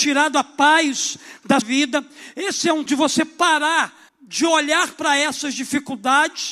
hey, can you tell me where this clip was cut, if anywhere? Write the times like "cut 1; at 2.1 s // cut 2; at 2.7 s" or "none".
cut 1; at 1.6 s // cut 2; at 2.9 s // cut 3; at 4.1 s